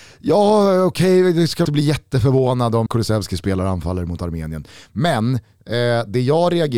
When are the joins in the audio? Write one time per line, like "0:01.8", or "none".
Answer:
0:01.6
0:02.9